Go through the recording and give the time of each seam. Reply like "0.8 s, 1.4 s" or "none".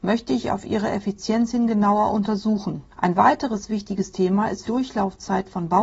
4.7 s